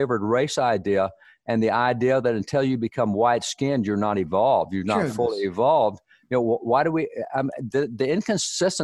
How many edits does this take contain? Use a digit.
0